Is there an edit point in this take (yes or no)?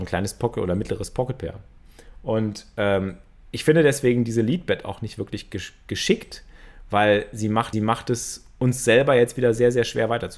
yes